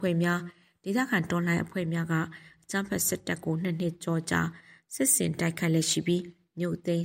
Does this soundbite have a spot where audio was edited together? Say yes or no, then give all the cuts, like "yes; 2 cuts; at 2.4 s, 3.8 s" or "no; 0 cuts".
no; 0 cuts